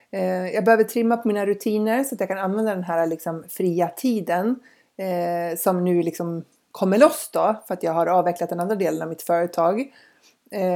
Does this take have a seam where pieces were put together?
no; 0 cuts

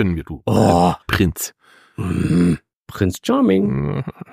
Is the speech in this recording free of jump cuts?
no; 2 cuts; at 1.0 s, 2.7 s

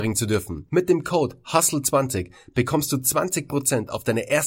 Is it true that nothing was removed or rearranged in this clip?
yes; 0 cuts

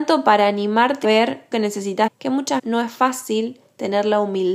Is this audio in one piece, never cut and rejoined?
no; 4 cuts; at 1.0 s, 1.5 s, 2.1 s, 2.6 s

